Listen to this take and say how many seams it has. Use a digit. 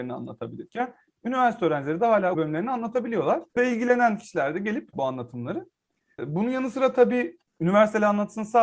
3